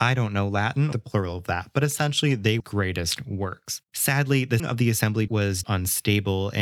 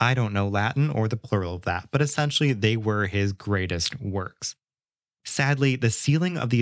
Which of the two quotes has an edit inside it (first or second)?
first